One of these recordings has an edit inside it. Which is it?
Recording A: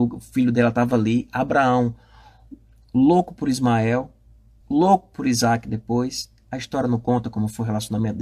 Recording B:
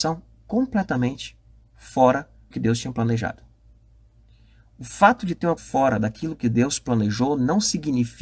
B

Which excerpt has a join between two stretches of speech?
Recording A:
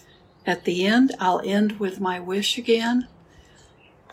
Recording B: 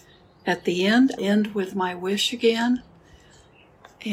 B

